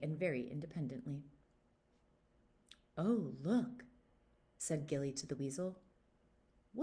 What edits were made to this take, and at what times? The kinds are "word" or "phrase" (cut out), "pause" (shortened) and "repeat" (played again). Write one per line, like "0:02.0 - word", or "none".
none